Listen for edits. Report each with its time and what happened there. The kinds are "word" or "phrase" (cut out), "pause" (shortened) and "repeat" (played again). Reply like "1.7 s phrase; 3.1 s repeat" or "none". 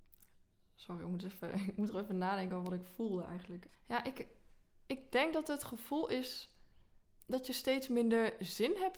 3.7 s pause; 4.5 s pause